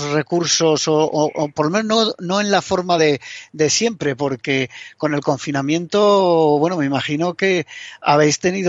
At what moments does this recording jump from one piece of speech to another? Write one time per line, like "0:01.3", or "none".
none